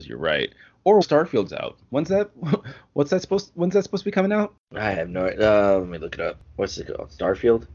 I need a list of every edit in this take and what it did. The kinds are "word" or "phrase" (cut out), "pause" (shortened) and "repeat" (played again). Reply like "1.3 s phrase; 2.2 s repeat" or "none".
1.0 s word; 1.5 s word